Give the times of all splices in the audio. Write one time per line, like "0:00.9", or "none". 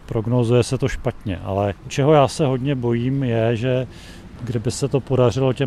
none